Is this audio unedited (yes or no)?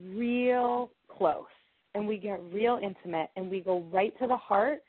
yes